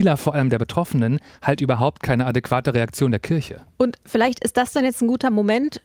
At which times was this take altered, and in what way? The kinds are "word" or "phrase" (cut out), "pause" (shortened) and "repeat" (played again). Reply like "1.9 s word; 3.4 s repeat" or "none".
none